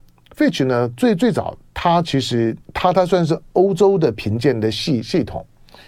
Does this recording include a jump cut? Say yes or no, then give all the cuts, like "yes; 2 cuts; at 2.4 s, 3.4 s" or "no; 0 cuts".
yes; 1 cut; at 2.6 s